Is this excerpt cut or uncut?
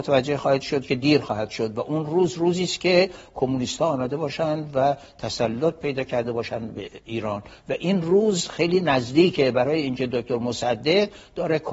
uncut